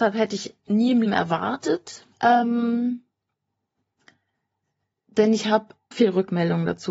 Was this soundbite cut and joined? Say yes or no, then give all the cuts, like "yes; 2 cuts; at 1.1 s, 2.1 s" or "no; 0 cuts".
yes; 3 cuts; at 1.0 s, 2.1 s, 5.9 s